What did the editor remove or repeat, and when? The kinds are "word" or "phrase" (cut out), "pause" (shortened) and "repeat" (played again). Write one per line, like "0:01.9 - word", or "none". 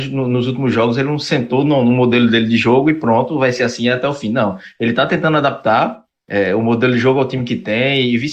none